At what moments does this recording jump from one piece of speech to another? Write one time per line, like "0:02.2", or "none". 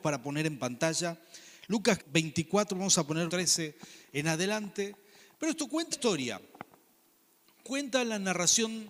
0:02.0
0:03.3
0:05.9